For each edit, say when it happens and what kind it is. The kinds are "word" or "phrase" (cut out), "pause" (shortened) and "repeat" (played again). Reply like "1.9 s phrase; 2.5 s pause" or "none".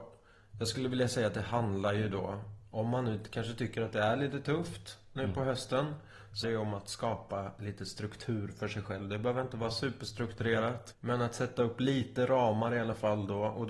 6.4 s word; 10.9 s word